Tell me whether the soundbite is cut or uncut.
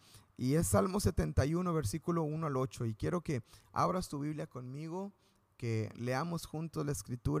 uncut